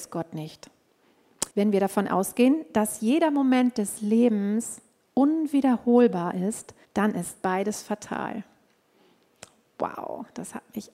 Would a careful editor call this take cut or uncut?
cut